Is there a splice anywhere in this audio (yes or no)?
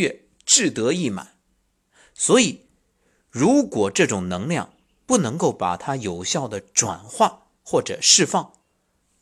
yes